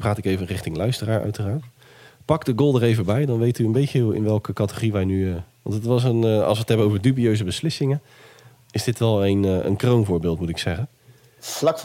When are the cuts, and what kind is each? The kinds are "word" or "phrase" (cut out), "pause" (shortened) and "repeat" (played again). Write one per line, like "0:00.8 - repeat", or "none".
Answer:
none